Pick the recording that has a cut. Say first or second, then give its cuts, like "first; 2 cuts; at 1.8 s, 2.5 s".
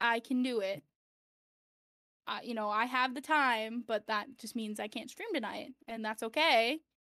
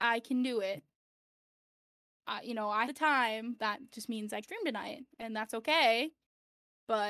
second; 3 cuts; at 2.9 s, 3.6 s, 4.4 s